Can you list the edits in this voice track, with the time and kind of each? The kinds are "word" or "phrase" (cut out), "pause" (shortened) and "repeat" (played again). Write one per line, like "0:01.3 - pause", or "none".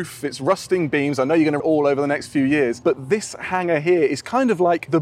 0:01.6 - word